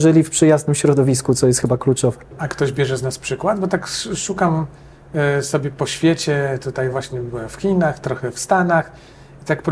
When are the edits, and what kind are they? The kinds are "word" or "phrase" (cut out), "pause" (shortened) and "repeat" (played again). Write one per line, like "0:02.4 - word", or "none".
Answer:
none